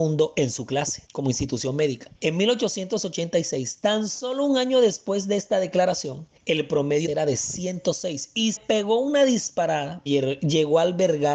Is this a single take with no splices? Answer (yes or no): no